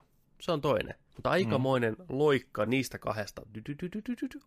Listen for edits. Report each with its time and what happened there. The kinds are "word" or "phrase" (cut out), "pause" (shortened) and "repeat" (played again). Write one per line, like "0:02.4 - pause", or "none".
none